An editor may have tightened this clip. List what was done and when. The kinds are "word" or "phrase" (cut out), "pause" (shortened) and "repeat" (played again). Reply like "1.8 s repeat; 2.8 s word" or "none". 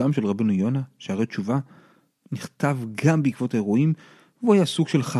none